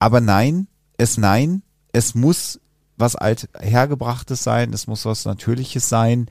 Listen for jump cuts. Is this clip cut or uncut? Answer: cut